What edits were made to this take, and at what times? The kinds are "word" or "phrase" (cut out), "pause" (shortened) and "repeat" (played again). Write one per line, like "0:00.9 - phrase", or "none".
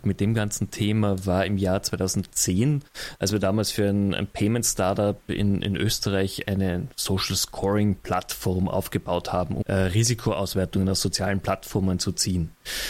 0:09.6 - word